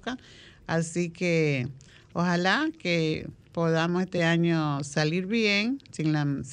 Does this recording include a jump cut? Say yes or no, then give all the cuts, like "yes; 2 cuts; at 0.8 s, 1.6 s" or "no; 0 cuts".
no; 0 cuts